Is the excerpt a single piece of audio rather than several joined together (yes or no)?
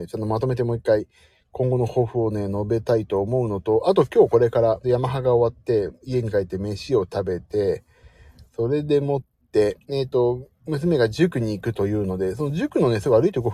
no